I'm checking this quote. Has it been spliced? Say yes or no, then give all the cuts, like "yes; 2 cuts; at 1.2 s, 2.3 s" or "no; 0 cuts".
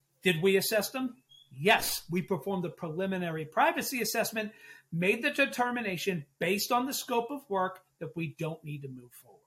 no; 0 cuts